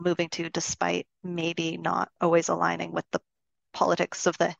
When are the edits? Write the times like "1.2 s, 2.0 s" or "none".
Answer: none